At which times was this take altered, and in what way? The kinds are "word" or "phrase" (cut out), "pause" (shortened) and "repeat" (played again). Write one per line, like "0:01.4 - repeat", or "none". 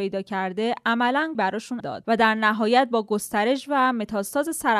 0:01.3 - word
0:01.8 - phrase

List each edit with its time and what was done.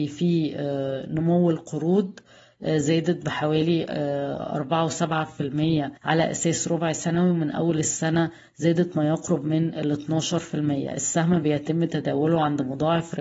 0:06.0 - pause

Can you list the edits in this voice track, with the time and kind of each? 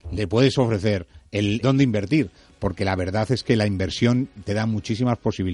0:01.6 - word

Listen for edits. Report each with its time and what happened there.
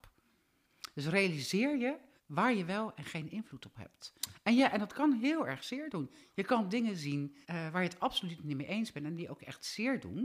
0:02.2 - pause
0:07.4 - pause

